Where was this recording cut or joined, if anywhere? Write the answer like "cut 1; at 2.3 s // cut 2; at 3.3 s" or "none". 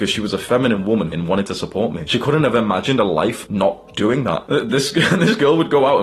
cut 1; at 1.1 s